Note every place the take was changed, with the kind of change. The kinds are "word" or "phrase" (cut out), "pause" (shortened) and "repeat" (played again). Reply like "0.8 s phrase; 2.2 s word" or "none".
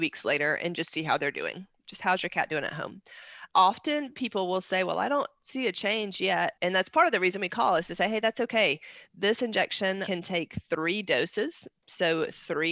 6.6 s pause